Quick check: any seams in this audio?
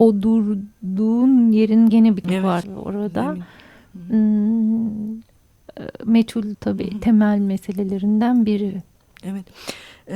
yes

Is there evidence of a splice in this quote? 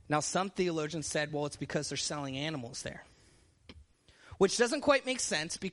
no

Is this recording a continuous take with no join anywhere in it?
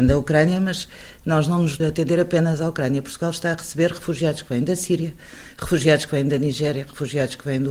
no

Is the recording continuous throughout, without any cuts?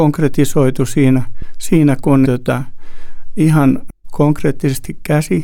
no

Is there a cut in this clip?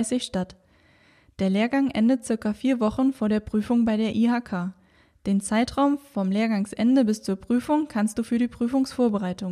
no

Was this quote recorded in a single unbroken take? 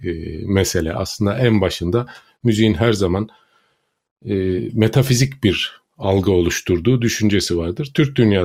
no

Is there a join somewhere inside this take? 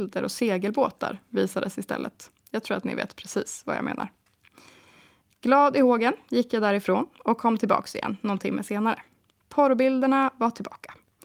no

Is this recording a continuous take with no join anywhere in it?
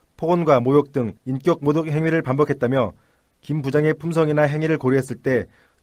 no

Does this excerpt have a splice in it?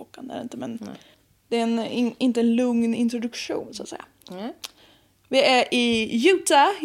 yes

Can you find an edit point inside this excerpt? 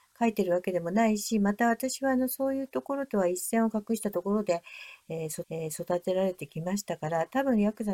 yes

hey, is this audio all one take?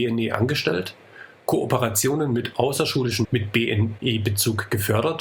no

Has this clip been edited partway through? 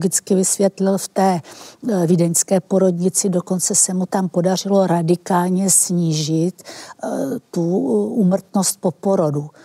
no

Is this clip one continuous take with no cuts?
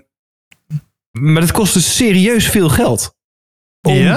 yes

